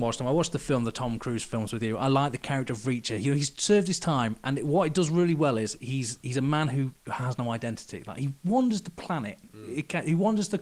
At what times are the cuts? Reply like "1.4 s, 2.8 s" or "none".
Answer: 7.0 s